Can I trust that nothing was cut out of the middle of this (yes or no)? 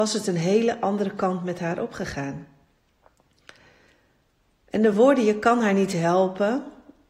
yes